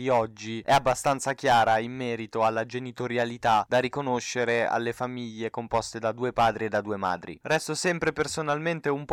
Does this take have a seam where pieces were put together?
no; 0 cuts

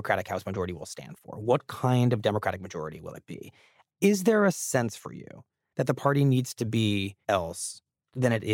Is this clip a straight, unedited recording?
no; 1 cut; at 7.2 s

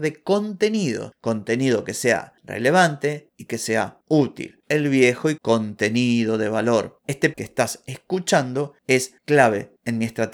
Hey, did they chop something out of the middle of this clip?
yes; 2 cuts; at 5.4 s, 7.3 s

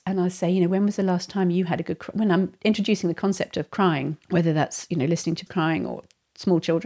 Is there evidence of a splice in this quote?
yes; 2 cuts; at 4.2 s, 5.5 s

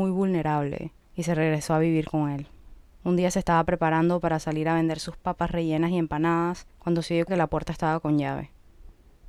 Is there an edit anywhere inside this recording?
yes; 4 cuts; at 1.0 s, 2.9 s, 6.7 s, 7.3 s

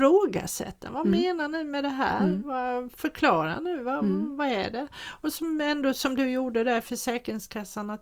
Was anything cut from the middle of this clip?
no; 0 cuts

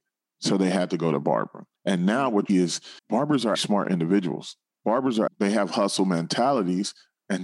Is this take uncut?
no; 5 cuts; at 1.8 s, 2.5 s, 3.0 s, 3.5 s, 5.3 s

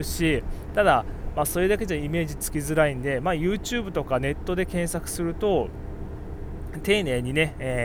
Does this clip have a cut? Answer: no; 0 cuts

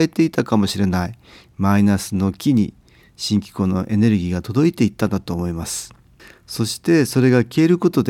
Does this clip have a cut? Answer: no; 0 cuts

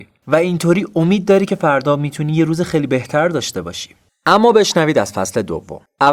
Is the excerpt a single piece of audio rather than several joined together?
yes; 0 cuts

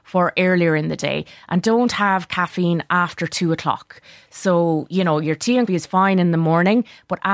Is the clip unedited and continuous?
no; 1 cut; at 5.7 s

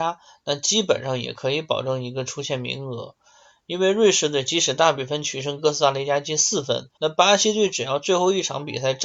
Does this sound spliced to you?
yes; 1 cut; at 6.9 s

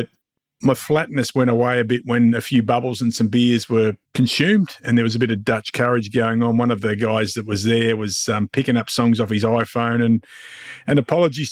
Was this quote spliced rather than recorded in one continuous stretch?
yes; 1 cut; at 4.0 s

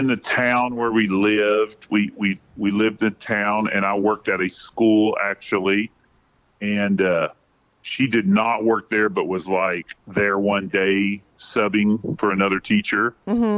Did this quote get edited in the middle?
no; 0 cuts

